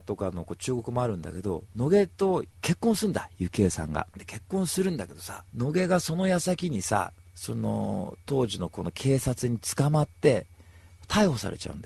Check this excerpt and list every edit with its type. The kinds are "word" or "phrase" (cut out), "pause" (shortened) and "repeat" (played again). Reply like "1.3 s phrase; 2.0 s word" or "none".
2.5 s pause; 4.1 s pause; 5.5 s pause